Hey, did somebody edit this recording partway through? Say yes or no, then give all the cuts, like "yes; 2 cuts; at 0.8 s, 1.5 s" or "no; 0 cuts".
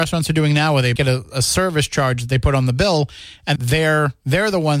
yes; 2 cuts; at 1.0 s, 3.6 s